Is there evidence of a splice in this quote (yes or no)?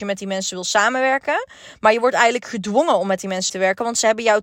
yes